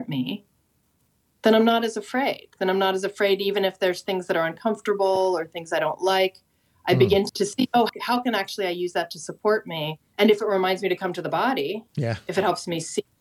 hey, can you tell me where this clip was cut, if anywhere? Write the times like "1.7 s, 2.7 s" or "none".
none